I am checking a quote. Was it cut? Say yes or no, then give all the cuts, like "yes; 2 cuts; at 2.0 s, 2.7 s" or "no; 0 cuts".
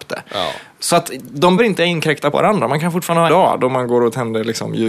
yes; 3 cuts; at 1.6 s, 2.3 s, 3.3 s